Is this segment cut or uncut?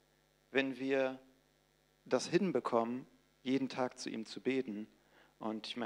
uncut